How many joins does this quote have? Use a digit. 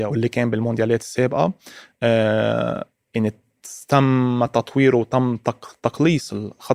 0